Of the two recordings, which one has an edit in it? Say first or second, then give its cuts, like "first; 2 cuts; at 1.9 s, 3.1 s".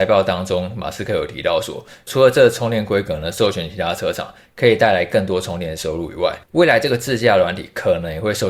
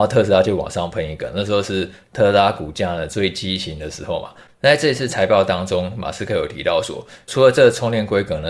first; 1 cut; at 6.4 s